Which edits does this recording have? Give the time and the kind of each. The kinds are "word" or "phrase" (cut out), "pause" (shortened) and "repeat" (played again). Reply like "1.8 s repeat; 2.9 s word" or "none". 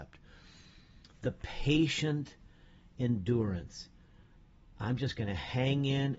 none

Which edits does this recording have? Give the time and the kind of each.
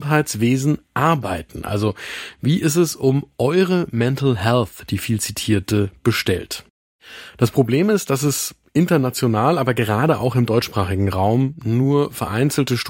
none

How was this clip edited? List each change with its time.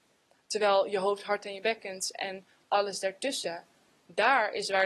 none

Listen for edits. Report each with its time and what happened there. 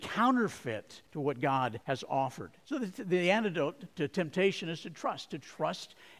1.0 s pause; 1.8 s pause; 2.6 s pause; 3.9 s pause

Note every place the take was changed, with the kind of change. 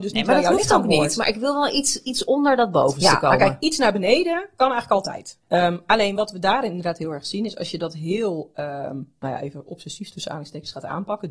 none

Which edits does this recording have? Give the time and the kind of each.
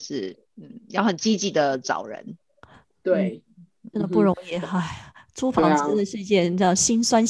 3.9 s word

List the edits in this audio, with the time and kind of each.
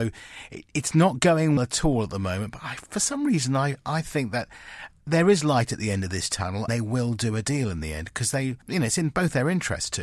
1.6 s word; 6.7 s word; 8.6 s pause

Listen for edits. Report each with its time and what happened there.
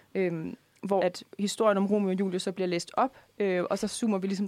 1.0 s word

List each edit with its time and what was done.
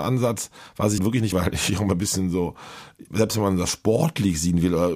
1.0 s word; 1.3 s word; 3.1 s word

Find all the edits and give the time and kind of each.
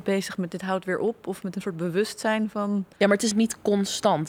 2.9 s pause; 3.3 s word

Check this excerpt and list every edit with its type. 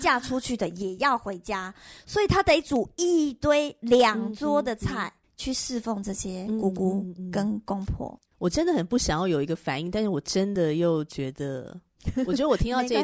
5.2 s pause; 8.3 s pause

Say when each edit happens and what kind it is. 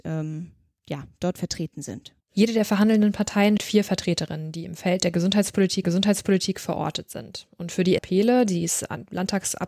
2.2 s pause; 3.6 s word; 5.8 s repeat; 8.0 s phrase

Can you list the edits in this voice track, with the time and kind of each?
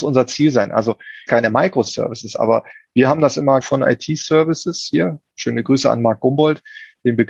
1.3 s phrase; 3.6 s phrase

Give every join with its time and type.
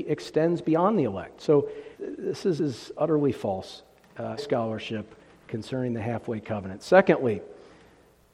1.9 s pause; 2.6 s phrase; 4.4 s word

